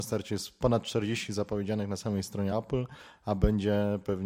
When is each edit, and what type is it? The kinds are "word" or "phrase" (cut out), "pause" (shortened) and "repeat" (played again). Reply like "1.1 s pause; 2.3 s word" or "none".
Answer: none